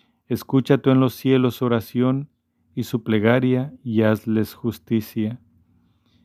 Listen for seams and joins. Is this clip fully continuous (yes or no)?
yes